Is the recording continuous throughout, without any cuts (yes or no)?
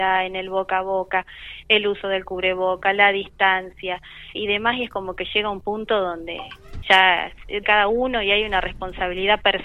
no